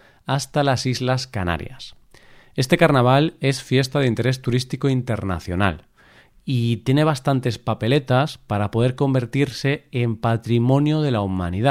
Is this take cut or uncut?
uncut